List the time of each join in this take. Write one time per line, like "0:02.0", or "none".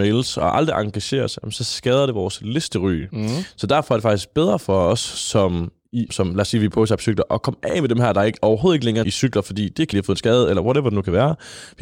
0:06.1
0:09.0
0:09.9